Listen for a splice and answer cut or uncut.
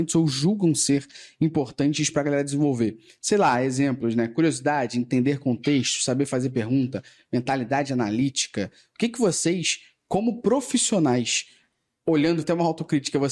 cut